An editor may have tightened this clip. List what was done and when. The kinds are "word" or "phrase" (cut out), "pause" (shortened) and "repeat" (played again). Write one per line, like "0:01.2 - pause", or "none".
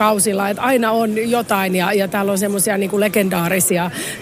none